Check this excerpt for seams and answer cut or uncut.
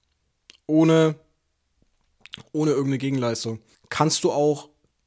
cut